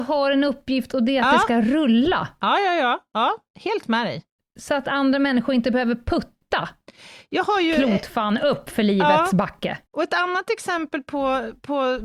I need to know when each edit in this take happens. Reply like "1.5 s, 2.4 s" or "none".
4.4 s, 9.9 s